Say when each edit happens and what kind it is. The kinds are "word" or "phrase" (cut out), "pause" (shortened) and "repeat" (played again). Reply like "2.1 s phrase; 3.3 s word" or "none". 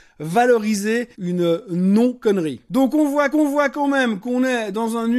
1.1 s pause; 3.3 s repeat